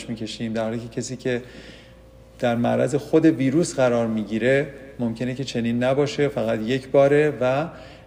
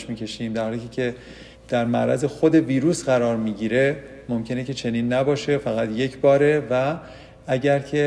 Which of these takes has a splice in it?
second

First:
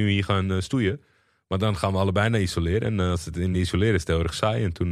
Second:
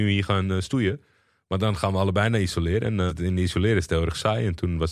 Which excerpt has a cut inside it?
second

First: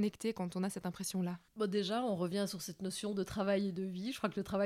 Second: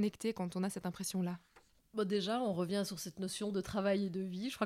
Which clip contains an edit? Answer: first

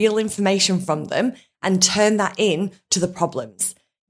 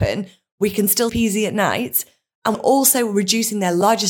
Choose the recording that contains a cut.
second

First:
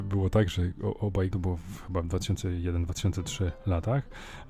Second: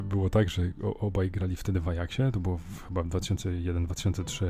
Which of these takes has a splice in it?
first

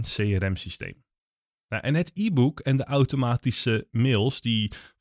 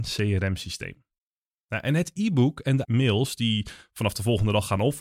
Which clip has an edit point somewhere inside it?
second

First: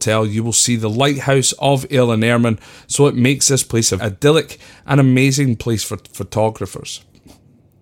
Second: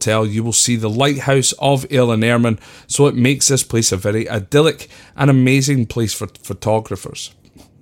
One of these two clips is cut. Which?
first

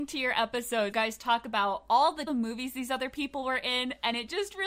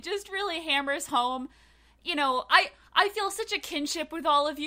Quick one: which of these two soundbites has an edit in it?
first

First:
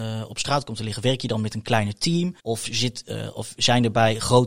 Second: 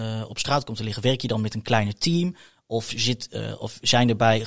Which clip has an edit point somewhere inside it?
first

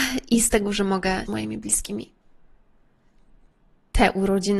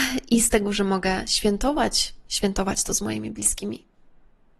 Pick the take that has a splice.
first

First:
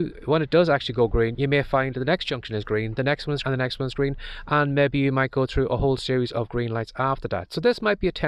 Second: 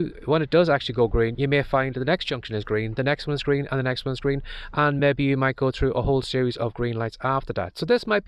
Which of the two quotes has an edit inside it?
first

